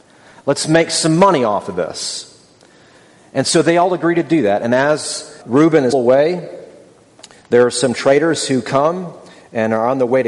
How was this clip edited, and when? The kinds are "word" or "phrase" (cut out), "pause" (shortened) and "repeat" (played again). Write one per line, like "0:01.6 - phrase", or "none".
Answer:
0:05.4 - word
0:05.9 - word